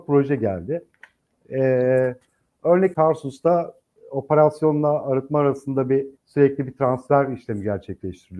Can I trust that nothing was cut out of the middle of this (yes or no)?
no